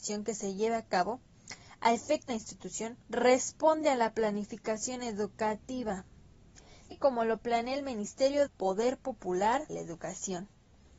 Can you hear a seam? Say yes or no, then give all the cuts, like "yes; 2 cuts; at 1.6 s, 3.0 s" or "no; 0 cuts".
yes; 5 cuts; at 2.3 s, 3.0 s, 6.9 s, 8.5 s, 9.7 s